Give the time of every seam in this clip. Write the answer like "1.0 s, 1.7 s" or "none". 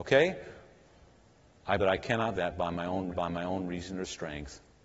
1.8 s, 2.3 s, 3.1 s